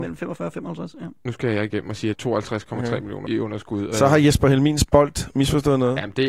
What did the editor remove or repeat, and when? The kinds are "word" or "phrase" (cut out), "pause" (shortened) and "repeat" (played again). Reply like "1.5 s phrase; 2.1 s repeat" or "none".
2.1 s phrase; 3.3 s word